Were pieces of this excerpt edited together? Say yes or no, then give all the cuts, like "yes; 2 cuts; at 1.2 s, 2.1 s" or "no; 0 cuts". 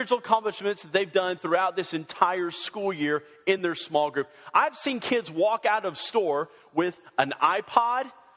no; 0 cuts